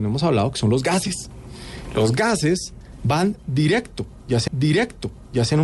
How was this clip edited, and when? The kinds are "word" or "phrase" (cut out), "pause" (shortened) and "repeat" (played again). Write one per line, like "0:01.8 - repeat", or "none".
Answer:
0:04.5 - repeat